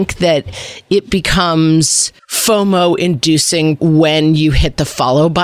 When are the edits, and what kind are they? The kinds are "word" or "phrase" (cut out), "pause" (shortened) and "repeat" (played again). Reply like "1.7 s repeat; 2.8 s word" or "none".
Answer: 3.8 s word